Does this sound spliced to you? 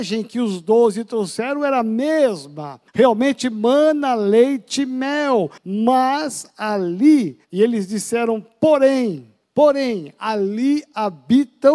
yes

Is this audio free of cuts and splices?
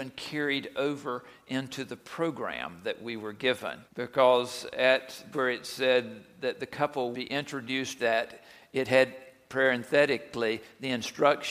no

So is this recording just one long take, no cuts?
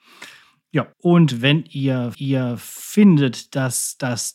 no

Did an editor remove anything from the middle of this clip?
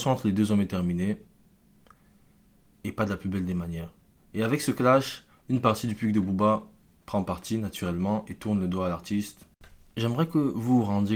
no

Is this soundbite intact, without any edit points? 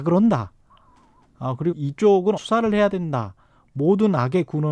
no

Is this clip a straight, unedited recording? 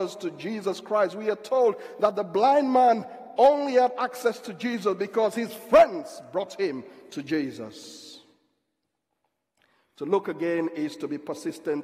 yes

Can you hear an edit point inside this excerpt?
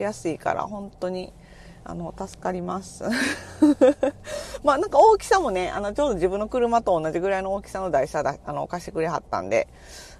no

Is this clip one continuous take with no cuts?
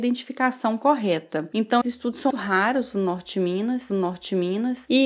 no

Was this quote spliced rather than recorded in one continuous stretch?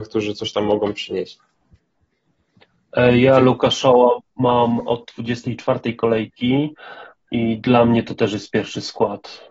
no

